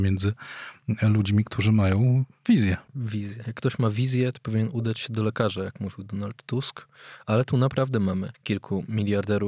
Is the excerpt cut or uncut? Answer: cut